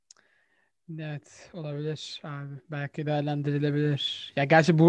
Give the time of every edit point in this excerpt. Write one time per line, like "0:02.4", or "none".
none